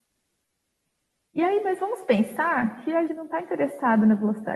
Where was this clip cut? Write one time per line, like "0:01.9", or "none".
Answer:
0:03.1

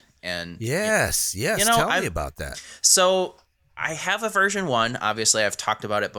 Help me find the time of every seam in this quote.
none

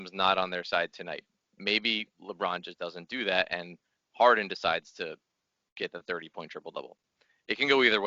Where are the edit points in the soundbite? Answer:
none

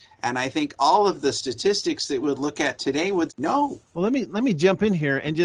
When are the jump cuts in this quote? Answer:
0:02.2
0:03.3
0:03.8

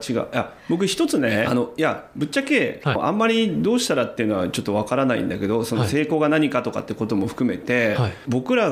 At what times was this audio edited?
0:01.4

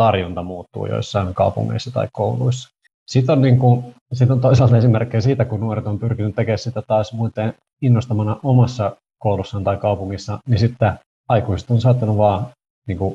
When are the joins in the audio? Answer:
0:02.9
0:04.0
0:11.1

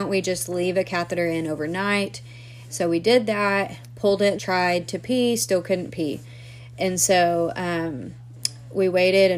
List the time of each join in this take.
0:04.4

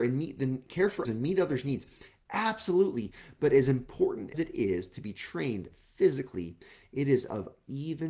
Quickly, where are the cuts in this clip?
0:01.0
0:04.3

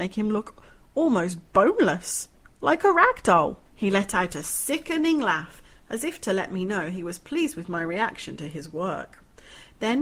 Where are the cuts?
0:03.7

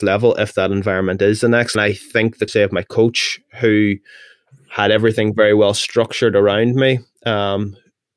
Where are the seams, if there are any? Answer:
0:01.7
0:02.5

